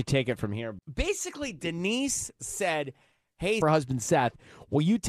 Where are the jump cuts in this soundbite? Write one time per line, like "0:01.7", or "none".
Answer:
0:03.6